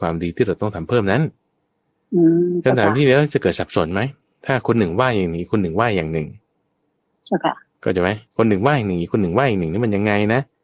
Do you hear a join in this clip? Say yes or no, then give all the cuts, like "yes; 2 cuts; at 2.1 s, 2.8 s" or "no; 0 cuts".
yes; 1 cut; at 8.3 s